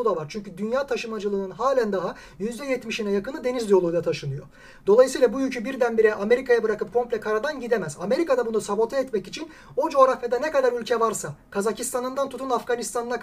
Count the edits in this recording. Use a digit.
0